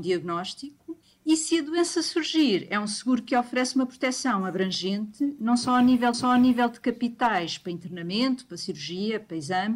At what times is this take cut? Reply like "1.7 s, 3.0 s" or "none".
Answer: 1.0 s, 6.1 s

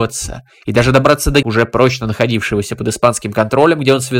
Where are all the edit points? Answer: 1.4 s

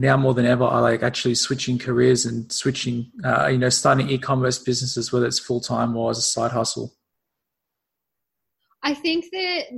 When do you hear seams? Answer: none

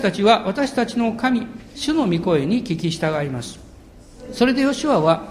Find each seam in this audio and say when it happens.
1.7 s

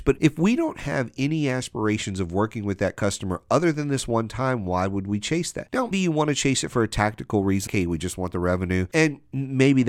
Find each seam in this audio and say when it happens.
5.9 s, 7.7 s

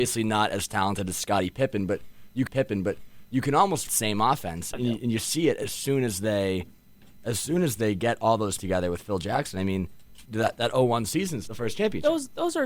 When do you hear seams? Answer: 2.5 s, 3.9 s, 4.7 s, 8.6 s, 10.3 s, 11.5 s

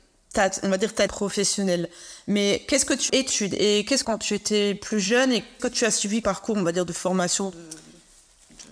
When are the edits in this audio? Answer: 1.1 s, 3.1 s, 4.0 s, 5.6 s, 6.2 s

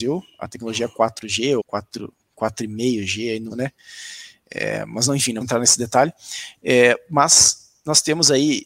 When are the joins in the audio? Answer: 1.6 s, 3.5 s, 5.4 s

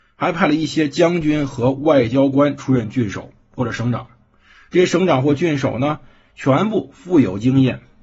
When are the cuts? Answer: none

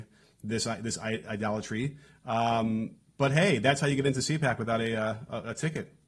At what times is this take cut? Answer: none

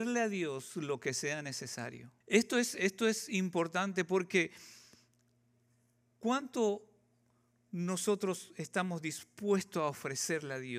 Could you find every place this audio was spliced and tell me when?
2.2 s

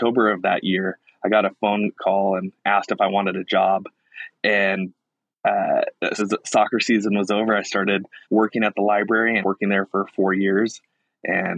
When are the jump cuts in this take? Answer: 5.3 s, 6.2 s, 8.2 s, 9.4 s

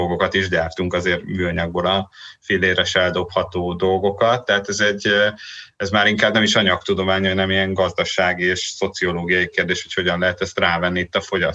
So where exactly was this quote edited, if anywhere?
none

